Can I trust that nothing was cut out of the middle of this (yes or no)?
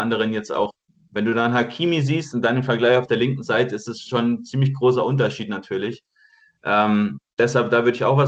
yes